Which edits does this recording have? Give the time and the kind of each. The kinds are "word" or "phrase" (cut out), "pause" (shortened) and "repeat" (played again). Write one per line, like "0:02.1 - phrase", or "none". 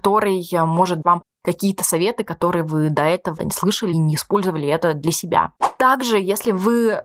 0:01.0 - word
0:03.4 - word
0:03.9 - word